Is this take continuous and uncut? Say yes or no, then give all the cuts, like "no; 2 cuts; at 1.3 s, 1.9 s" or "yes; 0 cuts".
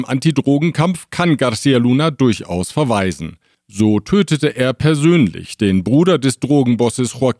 yes; 0 cuts